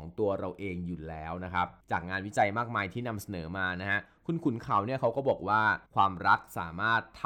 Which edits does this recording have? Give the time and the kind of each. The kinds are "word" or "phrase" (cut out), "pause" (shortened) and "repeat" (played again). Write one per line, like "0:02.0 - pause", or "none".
0:01.8 - pause
0:05.9 - pause